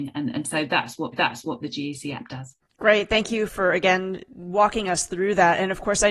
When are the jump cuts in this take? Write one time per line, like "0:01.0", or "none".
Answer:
0:01.1
0:02.6
0:03.5